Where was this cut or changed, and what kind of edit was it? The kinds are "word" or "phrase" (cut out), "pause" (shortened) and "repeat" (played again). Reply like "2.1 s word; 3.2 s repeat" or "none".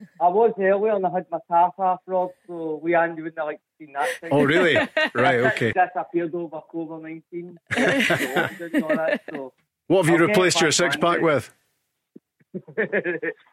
5.7 s phrase; 9.7 s pause